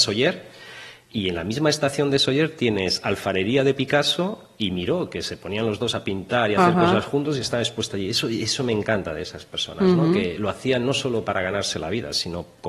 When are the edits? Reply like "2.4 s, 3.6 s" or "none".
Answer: none

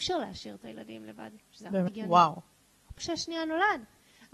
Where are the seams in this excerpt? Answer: 1.9 s, 3.0 s

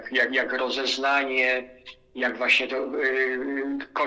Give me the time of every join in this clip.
none

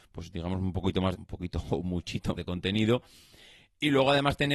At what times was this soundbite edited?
1.1 s, 2.4 s

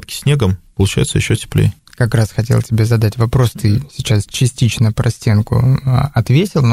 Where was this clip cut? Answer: none

